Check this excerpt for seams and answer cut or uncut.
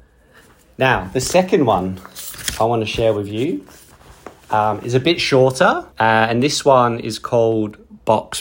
cut